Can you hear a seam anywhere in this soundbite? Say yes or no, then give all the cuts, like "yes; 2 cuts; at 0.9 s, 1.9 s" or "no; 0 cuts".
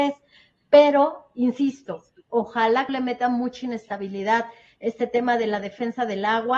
yes; 1 cut; at 2.9 s